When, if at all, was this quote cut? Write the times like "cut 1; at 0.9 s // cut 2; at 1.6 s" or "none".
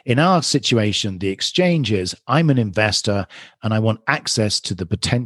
none